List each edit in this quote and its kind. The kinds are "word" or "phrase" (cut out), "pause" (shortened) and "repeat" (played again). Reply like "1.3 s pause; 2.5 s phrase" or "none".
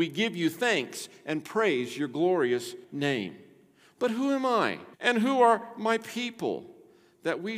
2.8 s pause; 4.9 s pause